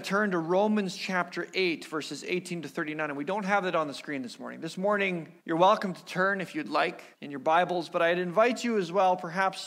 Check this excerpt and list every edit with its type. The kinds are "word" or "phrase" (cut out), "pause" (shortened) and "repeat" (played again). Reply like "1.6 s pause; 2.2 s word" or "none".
5.4 s pause; 7.1 s pause